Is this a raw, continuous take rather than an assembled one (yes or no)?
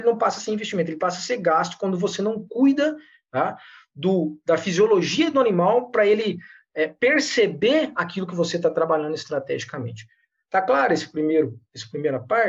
yes